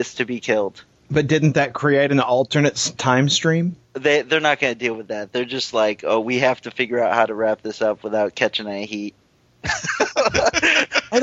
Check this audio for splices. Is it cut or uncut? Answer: cut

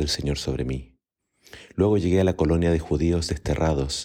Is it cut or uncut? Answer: uncut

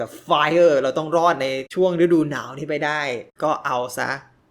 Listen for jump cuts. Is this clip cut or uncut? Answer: uncut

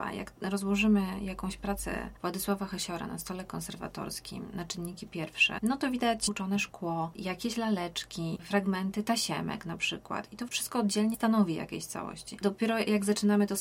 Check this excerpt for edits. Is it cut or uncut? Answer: cut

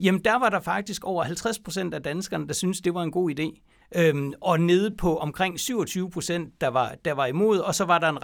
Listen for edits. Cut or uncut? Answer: uncut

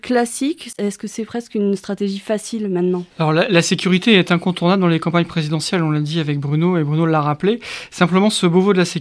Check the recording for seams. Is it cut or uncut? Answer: cut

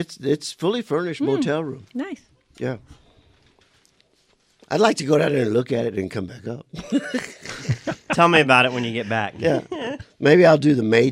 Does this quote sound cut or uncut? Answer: uncut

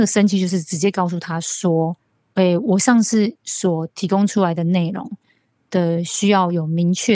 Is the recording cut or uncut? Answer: cut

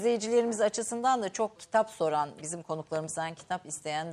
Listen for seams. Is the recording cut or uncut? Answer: cut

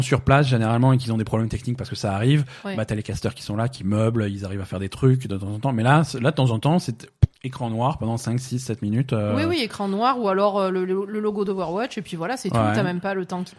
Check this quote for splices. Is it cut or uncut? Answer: uncut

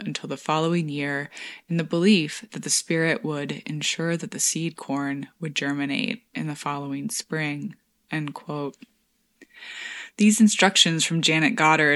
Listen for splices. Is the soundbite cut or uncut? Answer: uncut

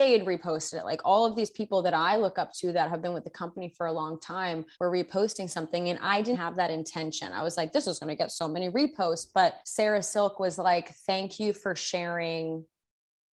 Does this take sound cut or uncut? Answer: cut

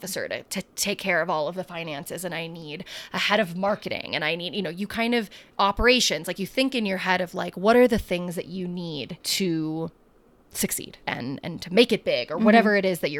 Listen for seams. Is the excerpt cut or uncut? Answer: cut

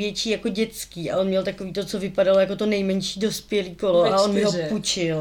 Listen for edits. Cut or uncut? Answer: uncut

